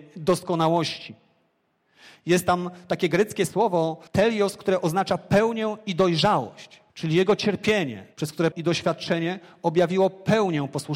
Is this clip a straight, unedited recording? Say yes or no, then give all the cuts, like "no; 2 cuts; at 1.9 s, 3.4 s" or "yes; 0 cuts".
no; 4 cuts; at 4.1 s, 6.9 s, 8.1 s, 8.5 s